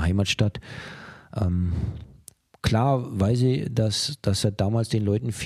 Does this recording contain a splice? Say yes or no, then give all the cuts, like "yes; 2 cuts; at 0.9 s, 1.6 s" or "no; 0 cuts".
no; 0 cuts